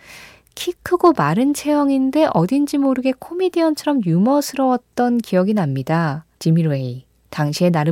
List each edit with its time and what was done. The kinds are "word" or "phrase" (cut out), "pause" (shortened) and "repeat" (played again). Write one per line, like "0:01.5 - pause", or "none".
0:06.3 - pause